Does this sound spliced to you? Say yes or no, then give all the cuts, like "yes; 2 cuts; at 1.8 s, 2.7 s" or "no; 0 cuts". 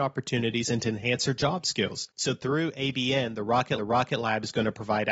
yes; 1 cut; at 3.8 s